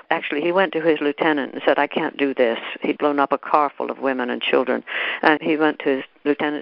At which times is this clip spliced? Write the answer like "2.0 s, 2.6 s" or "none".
3.0 s, 5.4 s

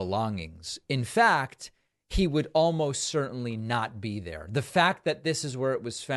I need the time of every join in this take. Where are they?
none

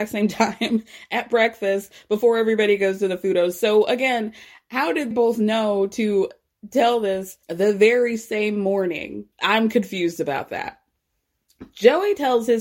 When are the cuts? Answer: 5.1 s, 7.4 s, 9.3 s

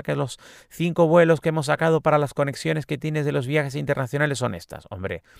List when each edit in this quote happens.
none

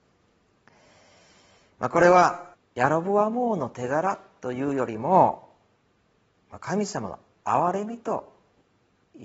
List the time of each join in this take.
2.5 s

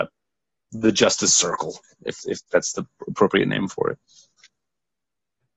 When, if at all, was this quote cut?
none

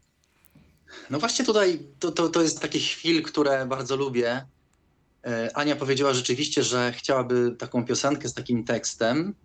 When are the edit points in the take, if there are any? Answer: 2.6 s

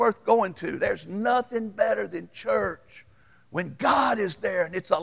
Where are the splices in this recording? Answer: none

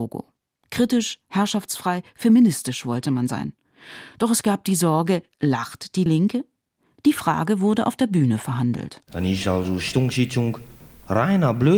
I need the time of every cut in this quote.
none

